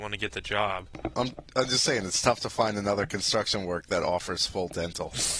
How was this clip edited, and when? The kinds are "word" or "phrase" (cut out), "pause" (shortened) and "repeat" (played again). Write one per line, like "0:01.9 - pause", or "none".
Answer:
none